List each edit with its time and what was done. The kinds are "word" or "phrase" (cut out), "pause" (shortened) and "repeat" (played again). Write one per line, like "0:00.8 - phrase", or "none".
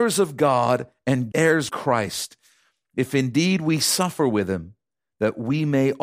0:01.3 - word
0:01.7 - word